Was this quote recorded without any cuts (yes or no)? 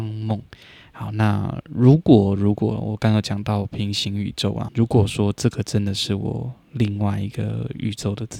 no